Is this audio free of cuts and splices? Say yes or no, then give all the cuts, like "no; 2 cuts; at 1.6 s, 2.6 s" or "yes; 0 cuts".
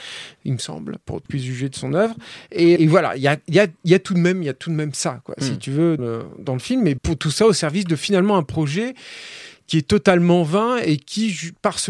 no; 4 cuts; at 1.3 s, 2.8 s, 6.0 s, 7.0 s